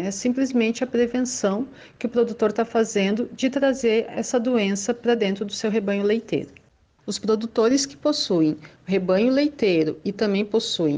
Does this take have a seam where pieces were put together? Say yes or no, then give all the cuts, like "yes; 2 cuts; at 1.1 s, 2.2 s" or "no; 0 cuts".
no; 0 cuts